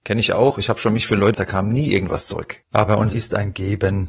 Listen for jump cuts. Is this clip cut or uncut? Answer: cut